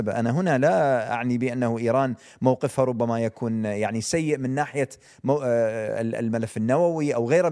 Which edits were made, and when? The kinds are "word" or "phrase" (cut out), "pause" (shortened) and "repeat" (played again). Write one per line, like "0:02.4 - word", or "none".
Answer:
none